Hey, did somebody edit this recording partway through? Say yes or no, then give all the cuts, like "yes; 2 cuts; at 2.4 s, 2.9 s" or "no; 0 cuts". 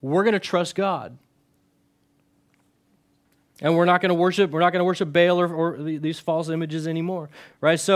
no; 0 cuts